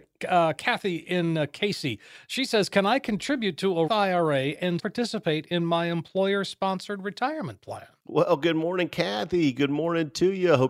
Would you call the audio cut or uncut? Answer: cut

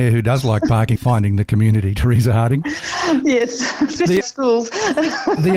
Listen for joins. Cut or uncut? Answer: cut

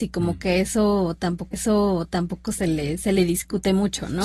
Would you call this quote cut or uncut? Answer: cut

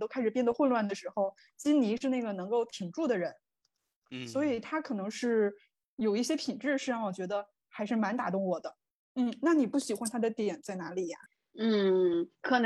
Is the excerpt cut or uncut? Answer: uncut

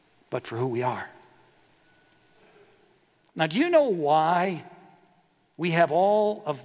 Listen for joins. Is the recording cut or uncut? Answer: uncut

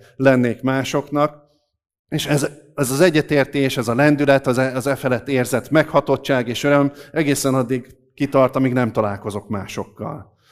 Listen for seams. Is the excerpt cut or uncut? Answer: uncut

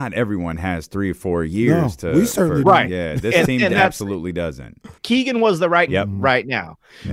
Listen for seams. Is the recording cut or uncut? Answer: cut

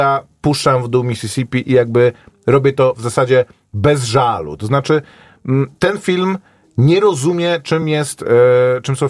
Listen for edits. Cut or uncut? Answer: uncut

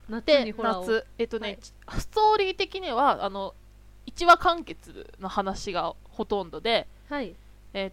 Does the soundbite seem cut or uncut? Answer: uncut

